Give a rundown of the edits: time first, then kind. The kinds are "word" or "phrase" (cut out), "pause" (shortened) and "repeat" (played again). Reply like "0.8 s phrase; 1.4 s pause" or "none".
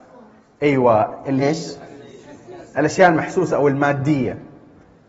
1.4 s word